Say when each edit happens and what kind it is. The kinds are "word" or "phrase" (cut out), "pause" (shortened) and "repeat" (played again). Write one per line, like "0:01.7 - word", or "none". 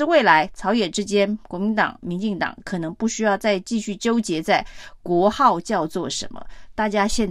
none